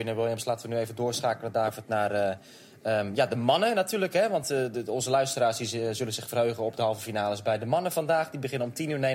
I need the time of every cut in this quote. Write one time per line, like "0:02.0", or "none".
none